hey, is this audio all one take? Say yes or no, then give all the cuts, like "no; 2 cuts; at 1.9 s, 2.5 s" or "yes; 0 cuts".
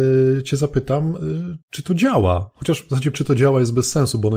no; 2 cuts; at 1.6 s, 3.1 s